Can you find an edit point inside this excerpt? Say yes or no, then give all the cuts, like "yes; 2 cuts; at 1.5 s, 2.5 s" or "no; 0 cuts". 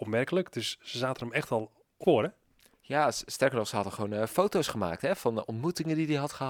yes; 1 cut; at 2.0 s